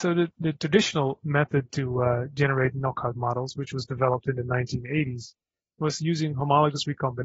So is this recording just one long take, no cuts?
yes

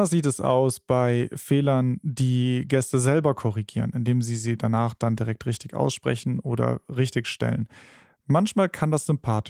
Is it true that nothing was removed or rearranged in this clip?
yes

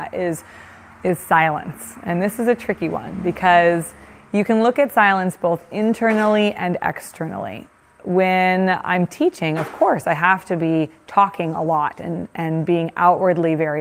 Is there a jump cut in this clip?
no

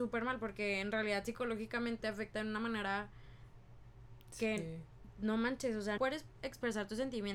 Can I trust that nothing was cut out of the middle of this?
no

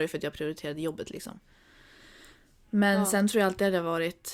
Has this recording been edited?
no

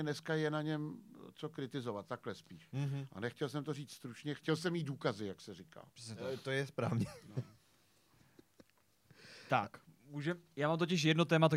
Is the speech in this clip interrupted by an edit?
no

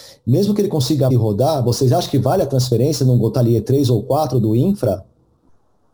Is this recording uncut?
no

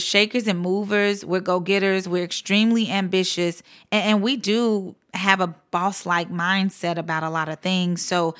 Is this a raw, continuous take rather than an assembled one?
yes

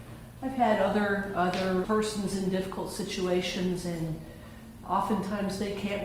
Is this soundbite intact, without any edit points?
no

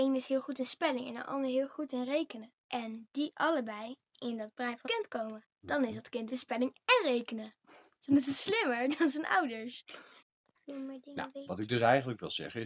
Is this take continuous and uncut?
no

